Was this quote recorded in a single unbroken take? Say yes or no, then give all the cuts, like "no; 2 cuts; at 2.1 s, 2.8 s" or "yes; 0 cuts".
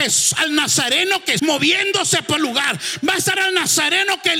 no; 3 cuts; at 1.4 s, 2.4 s, 3.4 s